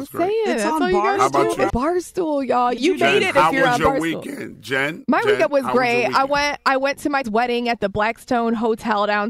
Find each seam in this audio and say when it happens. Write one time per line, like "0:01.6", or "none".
0:01.7
0:02.8
0:07.2